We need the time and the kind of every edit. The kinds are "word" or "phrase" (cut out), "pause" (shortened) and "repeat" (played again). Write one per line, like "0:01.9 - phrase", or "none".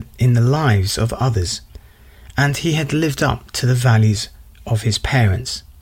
none